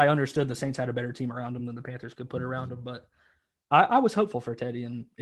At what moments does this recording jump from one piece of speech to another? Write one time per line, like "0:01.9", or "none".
none